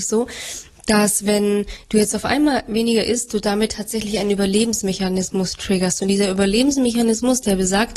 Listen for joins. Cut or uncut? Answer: uncut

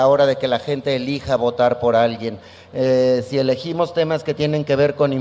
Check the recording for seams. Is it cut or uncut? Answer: uncut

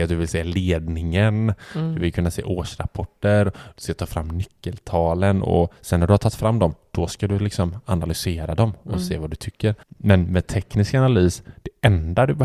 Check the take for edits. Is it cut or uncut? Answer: cut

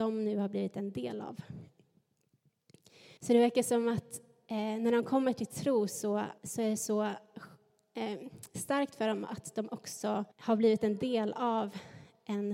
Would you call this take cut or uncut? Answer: cut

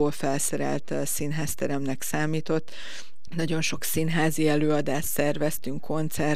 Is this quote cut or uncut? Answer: uncut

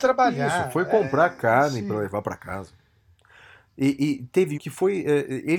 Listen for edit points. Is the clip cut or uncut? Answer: cut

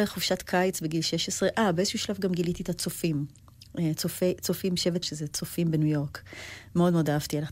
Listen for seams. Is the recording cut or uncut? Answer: cut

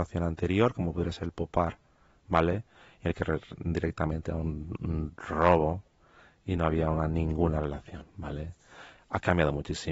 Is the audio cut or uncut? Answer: uncut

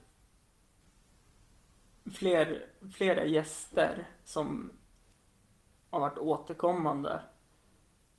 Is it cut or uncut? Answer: uncut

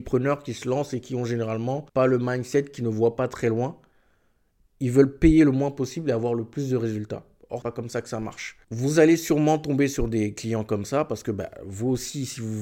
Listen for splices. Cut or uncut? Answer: cut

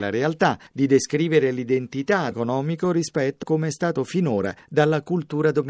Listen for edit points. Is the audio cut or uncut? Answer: cut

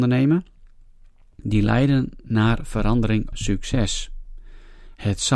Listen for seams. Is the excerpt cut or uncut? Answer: cut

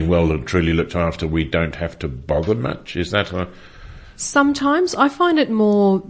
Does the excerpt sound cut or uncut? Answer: uncut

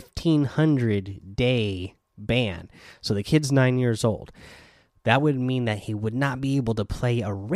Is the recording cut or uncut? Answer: uncut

